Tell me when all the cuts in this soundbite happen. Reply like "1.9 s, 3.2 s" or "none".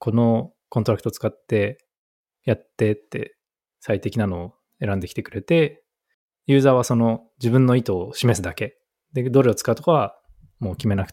none